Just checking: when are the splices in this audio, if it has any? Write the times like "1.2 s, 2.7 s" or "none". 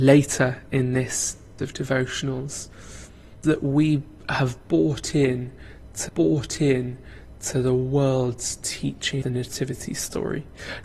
1.6 s, 3.4 s, 6.1 s, 9.2 s